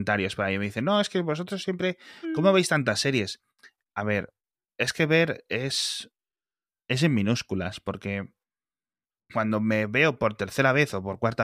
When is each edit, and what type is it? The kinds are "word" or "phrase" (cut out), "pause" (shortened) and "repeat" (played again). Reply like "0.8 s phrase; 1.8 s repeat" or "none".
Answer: none

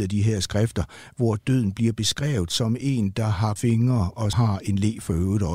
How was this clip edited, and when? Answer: 3.6 s word; 4.3 s word

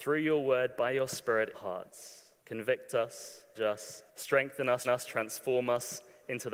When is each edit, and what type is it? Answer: 1.5 s phrase; 2.4 s pause; 3.5 s word; 4.1 s pause; 4.8 s repeat

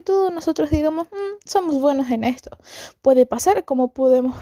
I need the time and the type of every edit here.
none

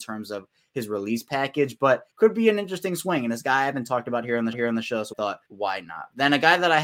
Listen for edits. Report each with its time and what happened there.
2.1 s pause; 4.5 s repeat; 5.1 s word; 5.5 s pause

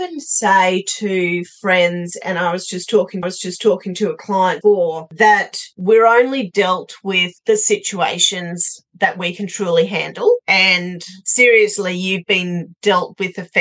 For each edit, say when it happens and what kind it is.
3.2 s repeat; 4.6 s word; 7.4 s pause

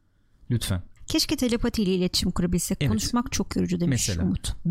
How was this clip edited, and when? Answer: 1.0 s pause

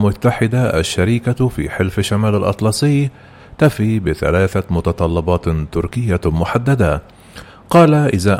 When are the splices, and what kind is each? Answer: none

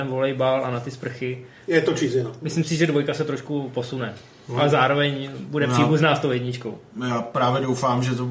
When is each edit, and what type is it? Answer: none

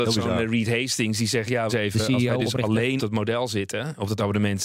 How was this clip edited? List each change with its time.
1.7 s phrase; 3.0 s word

